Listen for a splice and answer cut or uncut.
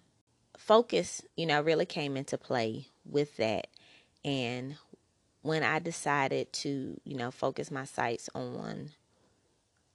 cut